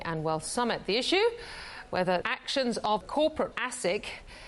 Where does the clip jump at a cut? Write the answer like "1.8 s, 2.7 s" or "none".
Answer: 2.2 s, 3.0 s, 3.5 s